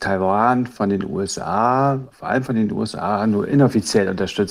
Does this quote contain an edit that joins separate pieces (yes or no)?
yes